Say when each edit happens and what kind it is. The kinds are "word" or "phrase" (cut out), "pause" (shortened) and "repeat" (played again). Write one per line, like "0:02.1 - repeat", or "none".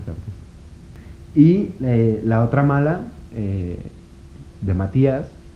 none